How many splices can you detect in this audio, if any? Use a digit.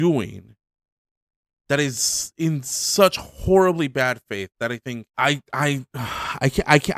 1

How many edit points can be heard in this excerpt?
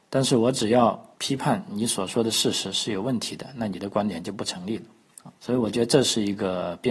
2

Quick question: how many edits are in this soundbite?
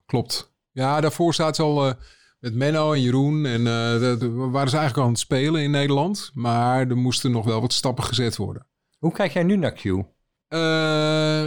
0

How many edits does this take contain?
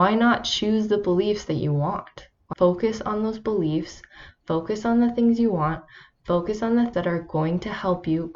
2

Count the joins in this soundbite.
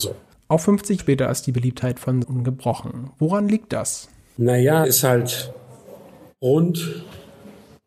3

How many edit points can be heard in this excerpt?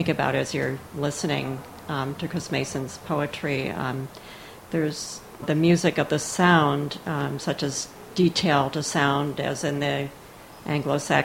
1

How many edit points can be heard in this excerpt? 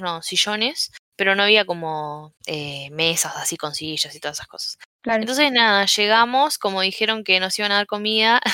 3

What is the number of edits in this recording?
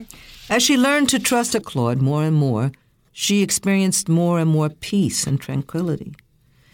2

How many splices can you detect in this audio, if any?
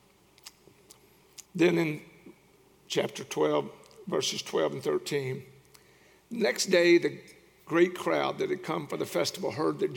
1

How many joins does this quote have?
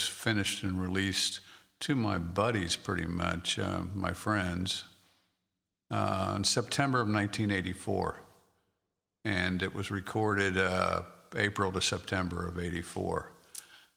0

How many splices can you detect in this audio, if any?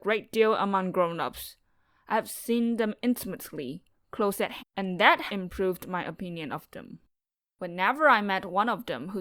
2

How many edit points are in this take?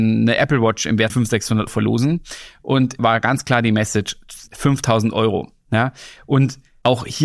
4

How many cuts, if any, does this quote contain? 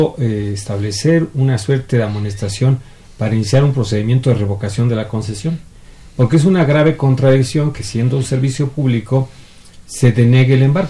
0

